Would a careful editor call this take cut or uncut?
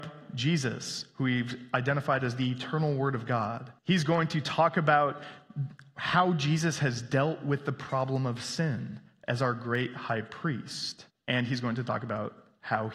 cut